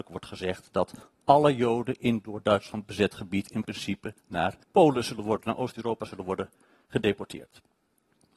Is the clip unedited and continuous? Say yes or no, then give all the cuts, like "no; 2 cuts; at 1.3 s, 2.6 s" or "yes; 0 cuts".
no; 1 cut; at 4.6 s